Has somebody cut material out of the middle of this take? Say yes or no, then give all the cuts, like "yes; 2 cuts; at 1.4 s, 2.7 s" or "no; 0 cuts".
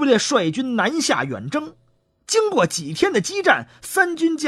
no; 0 cuts